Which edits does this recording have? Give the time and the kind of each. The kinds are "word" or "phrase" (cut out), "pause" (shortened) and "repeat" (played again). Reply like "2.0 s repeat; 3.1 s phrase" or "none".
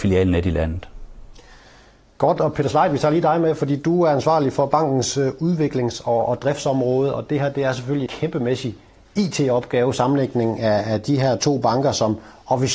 8.1 s word